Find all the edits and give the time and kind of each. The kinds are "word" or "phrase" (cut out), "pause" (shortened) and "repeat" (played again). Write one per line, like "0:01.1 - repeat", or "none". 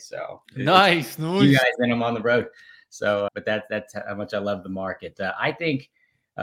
0:03.3 - word